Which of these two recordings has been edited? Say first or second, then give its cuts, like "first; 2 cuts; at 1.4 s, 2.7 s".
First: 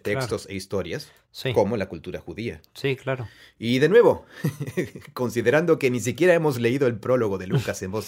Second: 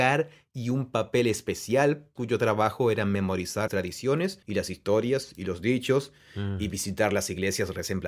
second; 3 cuts; at 2.2 s, 3.7 s, 4.4 s